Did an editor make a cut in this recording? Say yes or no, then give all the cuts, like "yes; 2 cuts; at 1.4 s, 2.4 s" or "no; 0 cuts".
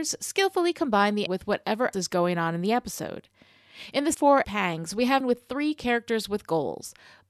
yes; 5 cuts; at 1.3 s, 1.9 s, 4.1 s, 4.4 s, 5.2 s